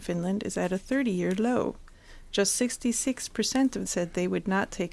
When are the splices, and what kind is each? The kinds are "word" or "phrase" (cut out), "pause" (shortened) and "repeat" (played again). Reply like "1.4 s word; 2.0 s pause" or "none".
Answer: 3.8 s phrase